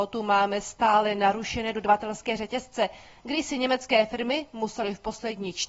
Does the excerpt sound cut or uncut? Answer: uncut